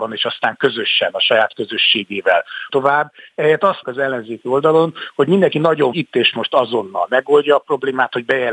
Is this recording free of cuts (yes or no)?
no